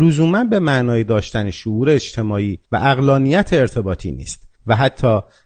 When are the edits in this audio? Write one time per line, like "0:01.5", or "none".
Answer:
0:02.6
0:04.5